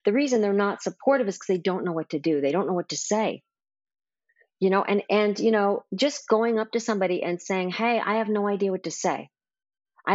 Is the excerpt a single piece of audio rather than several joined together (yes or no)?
yes